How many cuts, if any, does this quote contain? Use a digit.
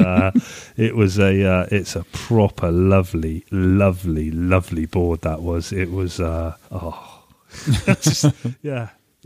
1